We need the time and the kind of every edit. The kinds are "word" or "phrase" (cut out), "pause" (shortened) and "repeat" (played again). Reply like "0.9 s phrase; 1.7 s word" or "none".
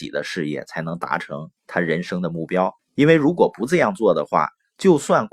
1.6 s pause; 2.8 s pause